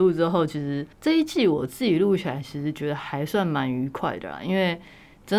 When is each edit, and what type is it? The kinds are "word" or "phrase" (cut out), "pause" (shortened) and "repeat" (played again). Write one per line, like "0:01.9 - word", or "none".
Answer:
0:00.9 - pause